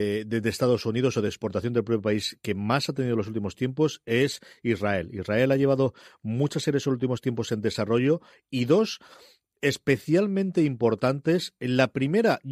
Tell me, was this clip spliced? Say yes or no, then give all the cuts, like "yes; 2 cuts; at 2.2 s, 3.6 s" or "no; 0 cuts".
no; 0 cuts